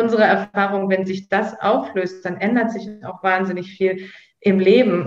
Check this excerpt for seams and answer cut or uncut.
uncut